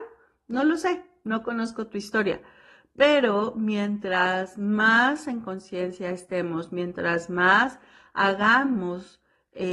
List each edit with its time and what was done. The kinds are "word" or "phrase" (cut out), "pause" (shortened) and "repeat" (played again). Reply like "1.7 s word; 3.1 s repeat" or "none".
none